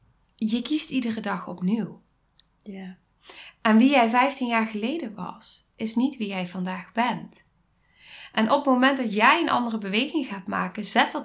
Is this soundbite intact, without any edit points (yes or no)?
yes